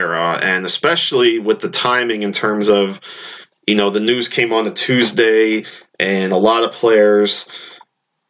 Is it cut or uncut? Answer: uncut